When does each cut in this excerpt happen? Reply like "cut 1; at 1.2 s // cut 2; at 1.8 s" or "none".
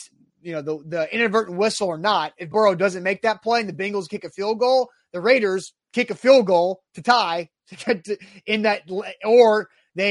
cut 1; at 2.5 s // cut 2; at 5.8 s